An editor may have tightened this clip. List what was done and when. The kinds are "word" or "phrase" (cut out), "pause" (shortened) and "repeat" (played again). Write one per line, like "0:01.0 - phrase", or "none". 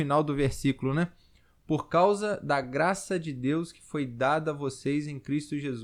none